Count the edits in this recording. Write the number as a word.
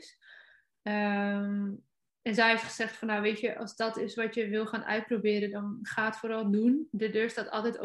zero